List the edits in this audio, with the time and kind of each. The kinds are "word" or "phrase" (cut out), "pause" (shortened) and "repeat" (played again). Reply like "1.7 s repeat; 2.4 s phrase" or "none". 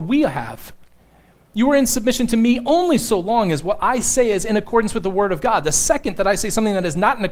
none